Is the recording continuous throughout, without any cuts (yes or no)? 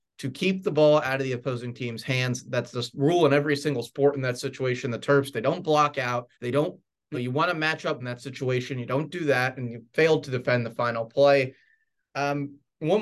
no